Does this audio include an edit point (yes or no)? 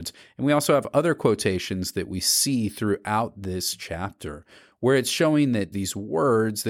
yes